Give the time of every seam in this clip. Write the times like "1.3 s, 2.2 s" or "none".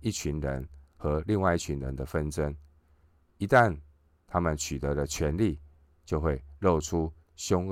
none